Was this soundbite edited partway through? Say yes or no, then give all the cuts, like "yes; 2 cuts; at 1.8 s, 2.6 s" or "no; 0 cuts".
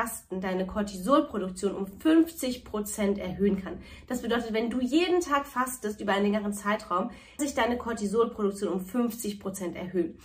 yes; 1 cut; at 7.4 s